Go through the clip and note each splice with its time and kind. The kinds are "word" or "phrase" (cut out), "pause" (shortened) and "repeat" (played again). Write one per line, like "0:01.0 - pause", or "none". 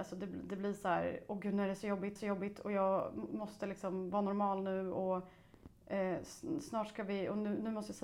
0:02.2 - repeat